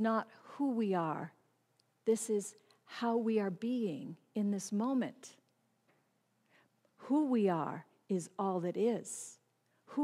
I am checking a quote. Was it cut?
no; 0 cuts

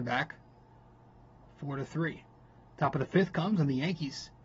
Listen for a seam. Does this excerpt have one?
yes; 1 cut; at 2.3 s

